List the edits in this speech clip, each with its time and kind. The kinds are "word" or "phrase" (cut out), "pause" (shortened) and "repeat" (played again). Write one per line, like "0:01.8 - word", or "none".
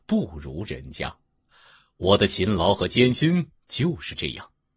none